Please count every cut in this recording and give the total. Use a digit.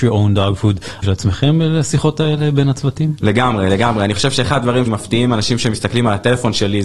2